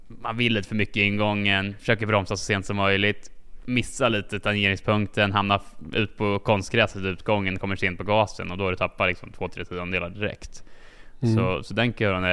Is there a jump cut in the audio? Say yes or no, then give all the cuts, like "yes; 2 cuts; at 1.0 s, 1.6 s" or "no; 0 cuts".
no; 0 cuts